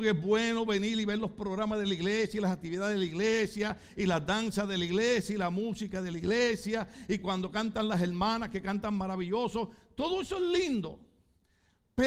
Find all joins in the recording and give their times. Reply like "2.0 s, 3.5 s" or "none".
none